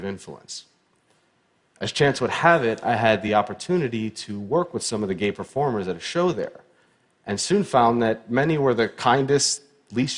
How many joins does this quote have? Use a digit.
0